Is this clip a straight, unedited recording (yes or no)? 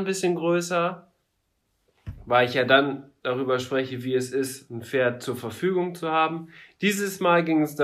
yes